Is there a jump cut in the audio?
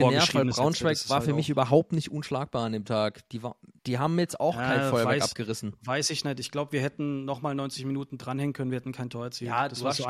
yes; 1 cut; at 3.8 s

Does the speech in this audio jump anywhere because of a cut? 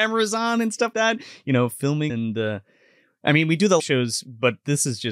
yes; 3 cuts; at 0.9 s, 2.1 s, 3.8 s

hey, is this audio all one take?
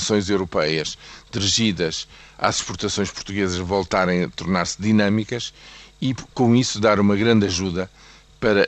yes; 0 cuts

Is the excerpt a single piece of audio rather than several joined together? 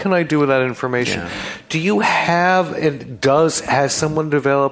yes; 0 cuts

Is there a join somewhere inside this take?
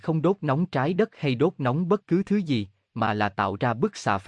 no; 0 cuts

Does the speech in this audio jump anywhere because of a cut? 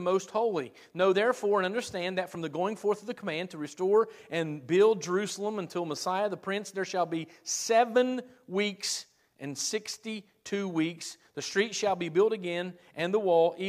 no; 0 cuts

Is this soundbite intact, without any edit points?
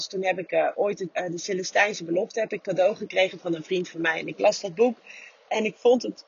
no; 1 cut; at 1.1 s

